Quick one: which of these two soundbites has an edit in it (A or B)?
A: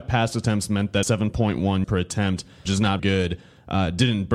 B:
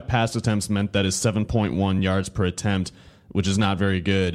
A